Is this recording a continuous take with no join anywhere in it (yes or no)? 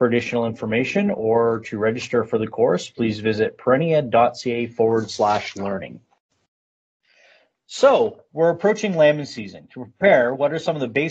yes